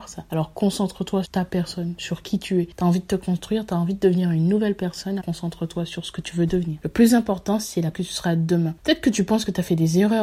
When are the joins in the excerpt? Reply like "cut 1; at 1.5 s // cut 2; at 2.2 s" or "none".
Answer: cut 1; at 1.2 s // cut 2; at 5.2 s // cut 3; at 7.9 s